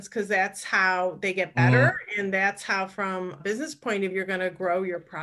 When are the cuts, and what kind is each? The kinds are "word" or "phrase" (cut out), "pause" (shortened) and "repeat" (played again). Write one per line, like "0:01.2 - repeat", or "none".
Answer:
0:03.4 - word
0:04.1 - word

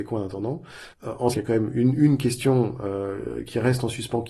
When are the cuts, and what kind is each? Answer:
0:00.9 - pause
0:01.3 - word

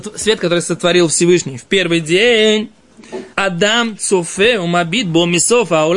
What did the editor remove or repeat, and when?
0:03.3 - pause

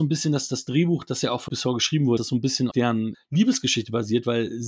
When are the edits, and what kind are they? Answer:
0:01.5 - word
0:02.2 - word
0:02.7 - word
0:03.1 - word

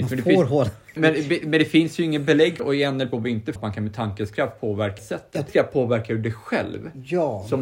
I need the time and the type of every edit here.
0:01.0 - word
0:02.6 - phrase
0:03.1 - word
0:03.6 - word
0:05.0 - phrase
0:05.5 - word

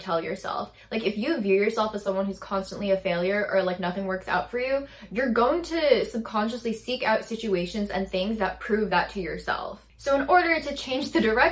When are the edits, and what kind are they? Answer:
none

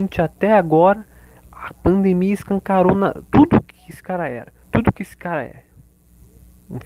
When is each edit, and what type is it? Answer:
0:03.3 - pause
0:04.6 - pause

